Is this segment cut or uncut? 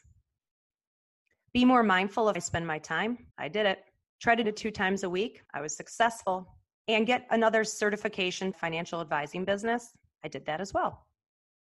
cut